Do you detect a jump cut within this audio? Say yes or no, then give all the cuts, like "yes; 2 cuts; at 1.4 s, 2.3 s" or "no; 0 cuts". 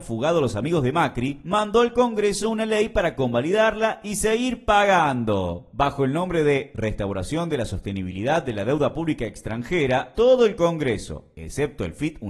no; 0 cuts